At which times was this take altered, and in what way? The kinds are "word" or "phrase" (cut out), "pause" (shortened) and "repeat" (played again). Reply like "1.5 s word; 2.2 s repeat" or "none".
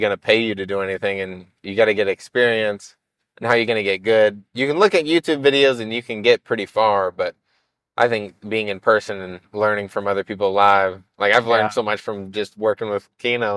none